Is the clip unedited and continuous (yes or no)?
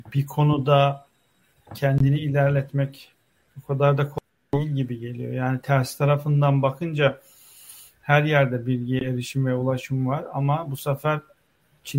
yes